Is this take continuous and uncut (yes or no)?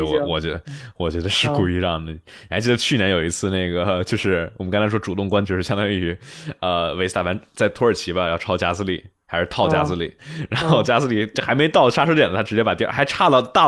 no